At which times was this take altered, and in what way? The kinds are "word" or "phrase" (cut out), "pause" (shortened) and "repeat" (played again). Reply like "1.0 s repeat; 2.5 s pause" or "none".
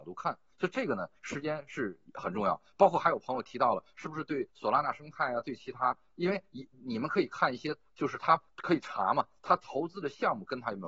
4.5 s pause; 8.5 s pause